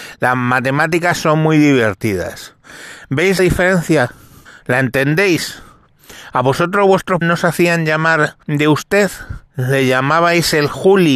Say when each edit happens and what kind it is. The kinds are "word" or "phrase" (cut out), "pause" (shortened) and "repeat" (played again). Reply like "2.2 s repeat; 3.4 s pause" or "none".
3.4 s word; 4.5 s pause; 7.2 s word; 8.4 s pause; 9.5 s pause